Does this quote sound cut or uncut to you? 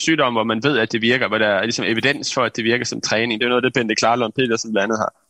uncut